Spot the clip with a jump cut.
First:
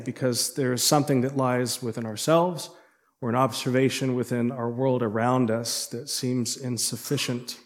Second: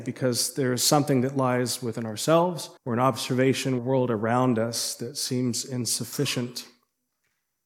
second; 2 cuts; at 2.8 s, 3.8 s

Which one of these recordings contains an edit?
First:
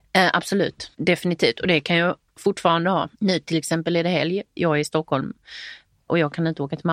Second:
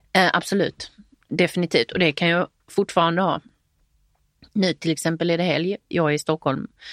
first; 2 cuts; at 0.9 s, 3.1 s

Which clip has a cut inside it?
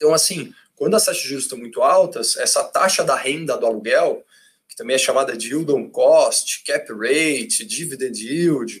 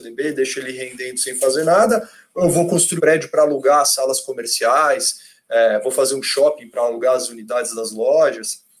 second; 1 cut; at 3.0 s

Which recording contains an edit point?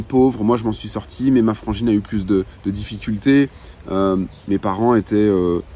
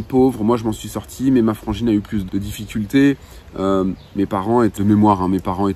second; 2 cuts; at 2.3 s, 4.8 s

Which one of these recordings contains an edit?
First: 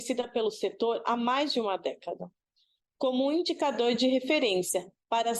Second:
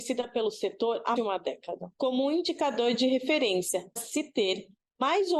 second; 3 cuts; at 1.2 s, 1.9 s, 4.0 s

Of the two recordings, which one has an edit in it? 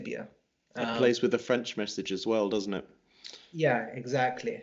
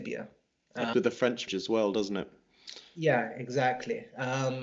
second; 2 cuts; at 0.9 s, 1.5 s

